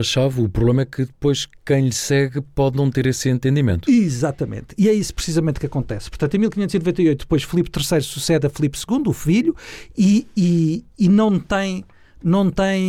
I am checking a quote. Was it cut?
no; 0 cuts

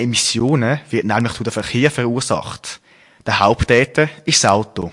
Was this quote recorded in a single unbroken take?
yes; 0 cuts

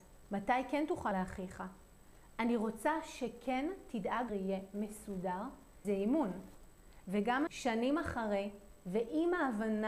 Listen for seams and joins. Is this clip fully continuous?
no; 4 cuts; at 1.1 s, 4.3 s, 5.8 s, 7.5 s

